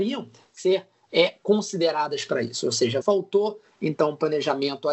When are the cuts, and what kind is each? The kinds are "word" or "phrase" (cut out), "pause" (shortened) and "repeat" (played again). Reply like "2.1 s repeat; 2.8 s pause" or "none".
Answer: 3.0 s word